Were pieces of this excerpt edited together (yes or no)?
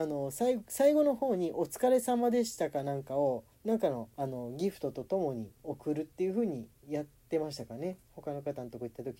yes